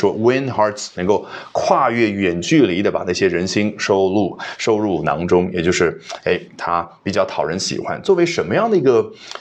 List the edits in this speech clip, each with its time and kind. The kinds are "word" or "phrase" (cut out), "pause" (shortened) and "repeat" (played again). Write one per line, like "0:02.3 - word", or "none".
0:00.9 - word